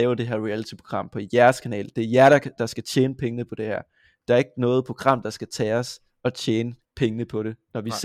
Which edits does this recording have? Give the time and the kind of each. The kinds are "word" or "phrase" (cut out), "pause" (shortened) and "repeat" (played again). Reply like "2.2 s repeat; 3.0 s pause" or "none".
6.8 s pause